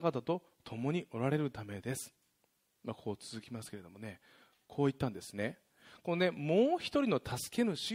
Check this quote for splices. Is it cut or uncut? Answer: uncut